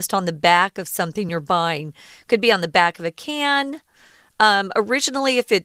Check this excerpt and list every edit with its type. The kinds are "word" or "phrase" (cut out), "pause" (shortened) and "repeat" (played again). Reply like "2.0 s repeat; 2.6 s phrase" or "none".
none